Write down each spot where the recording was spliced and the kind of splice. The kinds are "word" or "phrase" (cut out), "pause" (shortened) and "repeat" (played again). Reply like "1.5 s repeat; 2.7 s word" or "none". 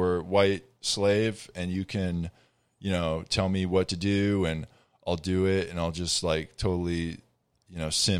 none